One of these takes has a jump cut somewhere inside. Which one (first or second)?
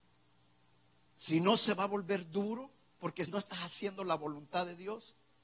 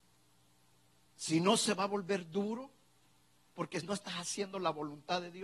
first